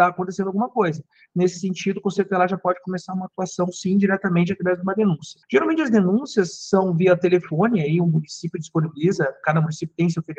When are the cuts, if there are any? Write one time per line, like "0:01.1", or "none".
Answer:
none